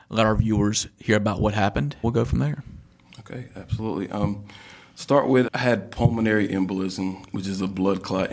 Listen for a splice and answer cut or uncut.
cut